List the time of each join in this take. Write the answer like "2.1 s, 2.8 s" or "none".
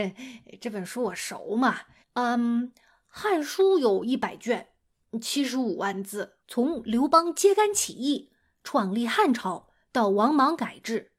2.0 s, 6.4 s